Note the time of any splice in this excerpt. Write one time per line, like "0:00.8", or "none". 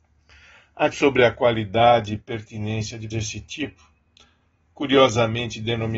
0:00.9
0:03.1